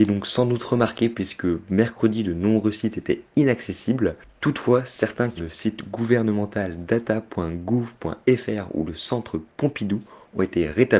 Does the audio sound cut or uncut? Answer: cut